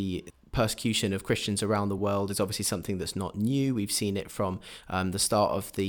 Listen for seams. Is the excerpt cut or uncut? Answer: uncut